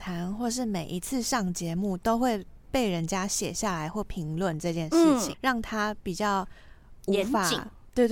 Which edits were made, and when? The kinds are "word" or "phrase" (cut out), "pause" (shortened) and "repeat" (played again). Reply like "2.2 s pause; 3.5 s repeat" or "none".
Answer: 5.3 s word